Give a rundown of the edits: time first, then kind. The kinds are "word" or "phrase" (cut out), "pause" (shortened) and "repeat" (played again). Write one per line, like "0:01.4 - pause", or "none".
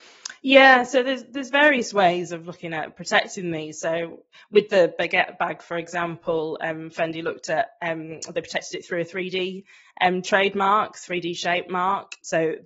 none